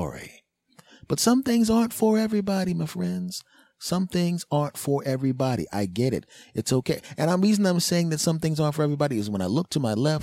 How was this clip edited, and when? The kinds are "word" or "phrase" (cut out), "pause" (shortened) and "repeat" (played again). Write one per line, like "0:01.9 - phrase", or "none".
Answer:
none